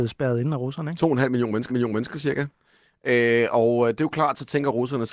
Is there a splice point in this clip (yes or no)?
yes